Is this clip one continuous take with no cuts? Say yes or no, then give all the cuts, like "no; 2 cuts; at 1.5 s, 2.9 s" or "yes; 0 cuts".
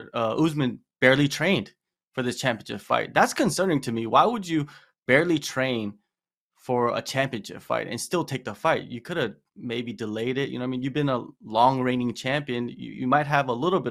yes; 0 cuts